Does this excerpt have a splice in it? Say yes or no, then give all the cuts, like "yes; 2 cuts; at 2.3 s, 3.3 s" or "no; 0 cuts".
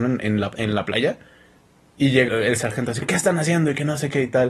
yes; 2 cuts; at 2.3 s, 3.0 s